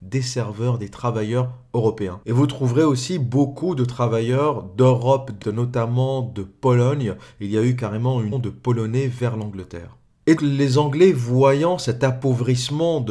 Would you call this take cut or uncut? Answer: cut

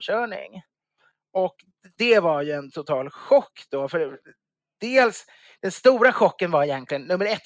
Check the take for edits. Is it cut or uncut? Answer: uncut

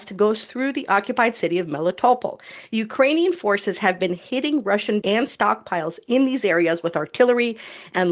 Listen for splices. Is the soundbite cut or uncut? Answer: cut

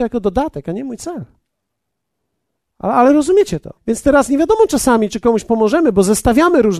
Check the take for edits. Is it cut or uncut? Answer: cut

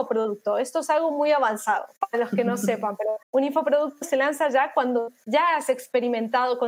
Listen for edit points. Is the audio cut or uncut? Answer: cut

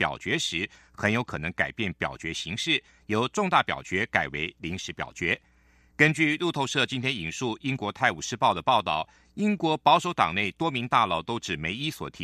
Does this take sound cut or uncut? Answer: uncut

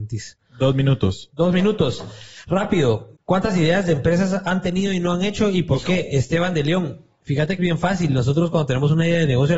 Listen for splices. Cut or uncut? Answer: cut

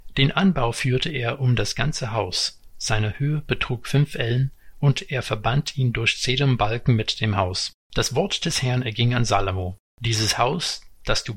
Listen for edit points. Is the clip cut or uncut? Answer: cut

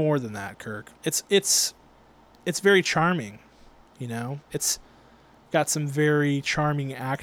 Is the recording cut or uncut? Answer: uncut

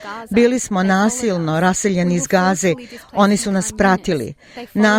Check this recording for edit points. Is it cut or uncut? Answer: uncut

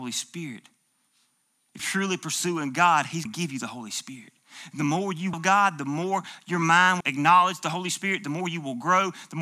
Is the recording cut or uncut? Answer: cut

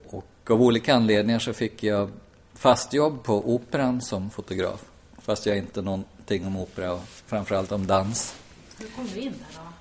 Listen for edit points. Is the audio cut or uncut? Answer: cut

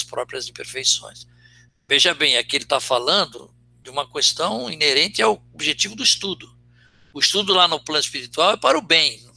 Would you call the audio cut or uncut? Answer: uncut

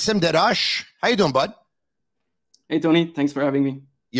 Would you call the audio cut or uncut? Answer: uncut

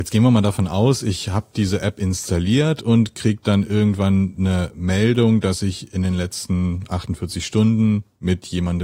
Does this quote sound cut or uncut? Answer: uncut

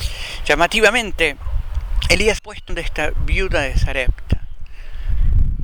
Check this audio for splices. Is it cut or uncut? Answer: cut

